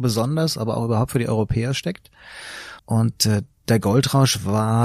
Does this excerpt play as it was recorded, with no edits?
no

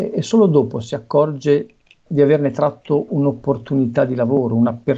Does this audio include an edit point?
yes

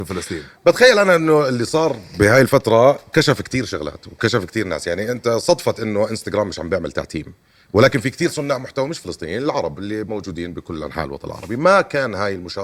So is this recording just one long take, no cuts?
yes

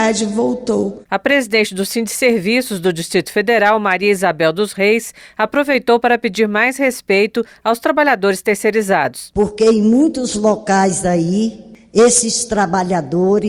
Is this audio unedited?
yes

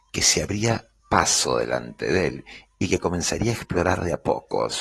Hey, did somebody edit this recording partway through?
no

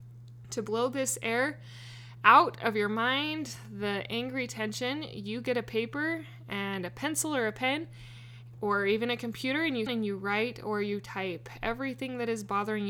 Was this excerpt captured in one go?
no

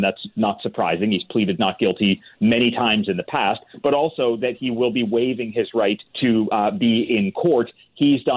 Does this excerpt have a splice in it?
yes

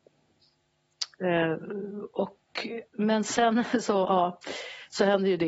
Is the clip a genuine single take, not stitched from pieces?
yes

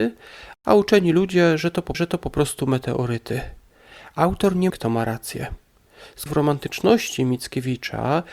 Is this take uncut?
no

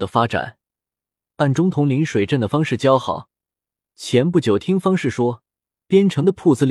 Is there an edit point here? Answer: no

